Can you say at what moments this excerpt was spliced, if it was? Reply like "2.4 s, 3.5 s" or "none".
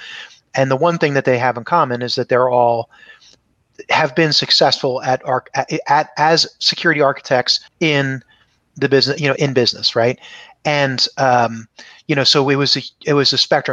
7.7 s, 9.4 s